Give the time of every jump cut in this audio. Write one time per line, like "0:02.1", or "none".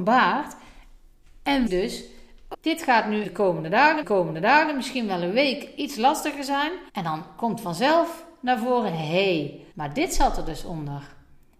0:01.7
0:02.5
0:03.2
0:04.0
0:06.9
0:09.7